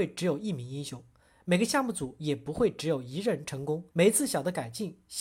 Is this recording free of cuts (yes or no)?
no